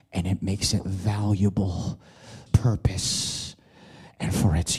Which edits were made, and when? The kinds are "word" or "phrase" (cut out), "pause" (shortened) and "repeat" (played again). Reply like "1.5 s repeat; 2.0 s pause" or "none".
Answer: 2.5 s phrase